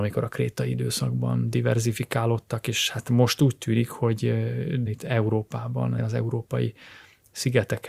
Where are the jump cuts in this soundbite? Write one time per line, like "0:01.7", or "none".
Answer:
0:04.9
0:06.0